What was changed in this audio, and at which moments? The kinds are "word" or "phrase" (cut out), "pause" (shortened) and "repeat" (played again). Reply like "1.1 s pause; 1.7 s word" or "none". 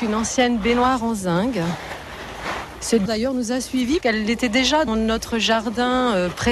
3.1 s word; 4.0 s word; 4.9 s word